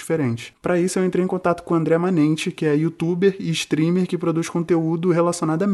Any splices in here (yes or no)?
no